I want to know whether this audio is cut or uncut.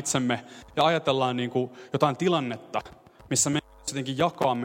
uncut